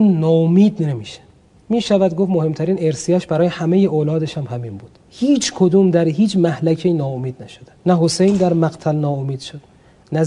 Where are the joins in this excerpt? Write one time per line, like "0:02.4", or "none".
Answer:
0:05.0
0:07.8

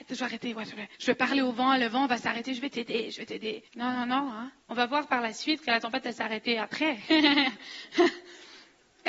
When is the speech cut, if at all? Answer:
0:00.9
0:03.7
0:04.6

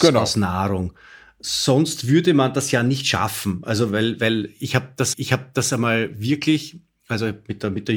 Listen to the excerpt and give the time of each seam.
0:05.1

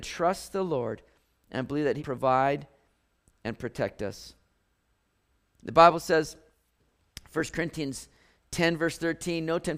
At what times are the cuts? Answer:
0:02.0

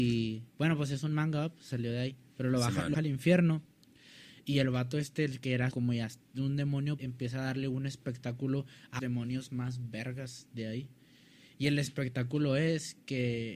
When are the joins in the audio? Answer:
0:02.9
0:05.7
0:07.0
0:09.0

